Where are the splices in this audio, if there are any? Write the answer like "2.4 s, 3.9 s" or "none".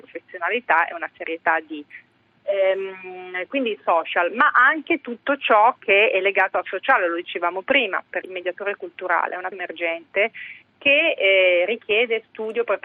8.2 s, 9.5 s